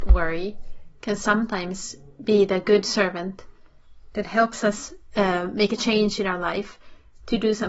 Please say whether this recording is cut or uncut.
uncut